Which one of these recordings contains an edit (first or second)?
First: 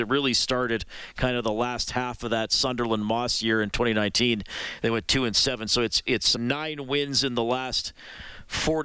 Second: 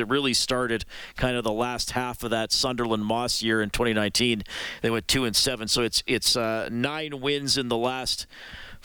first